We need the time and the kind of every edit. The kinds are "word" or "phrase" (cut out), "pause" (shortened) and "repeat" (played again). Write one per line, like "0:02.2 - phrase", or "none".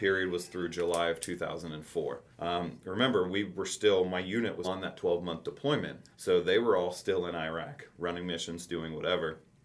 0:02.3 - pause
0:04.6 - word
0:06.1 - pause